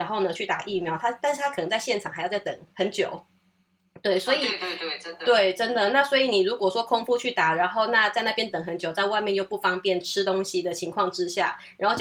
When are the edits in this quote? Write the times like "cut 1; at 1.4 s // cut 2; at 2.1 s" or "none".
cut 1; at 2.7 s